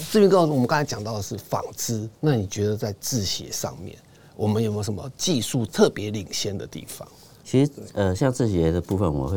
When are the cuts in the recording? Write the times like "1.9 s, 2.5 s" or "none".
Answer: none